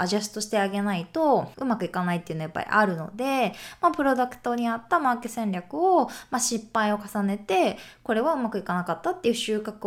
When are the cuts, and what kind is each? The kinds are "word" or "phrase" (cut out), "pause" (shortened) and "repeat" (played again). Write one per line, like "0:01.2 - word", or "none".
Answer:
0:01.5 - pause